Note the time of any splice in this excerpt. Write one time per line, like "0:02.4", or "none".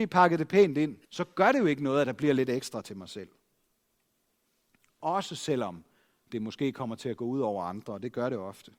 0:01.0
0:03.7